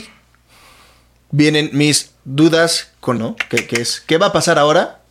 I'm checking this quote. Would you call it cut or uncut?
cut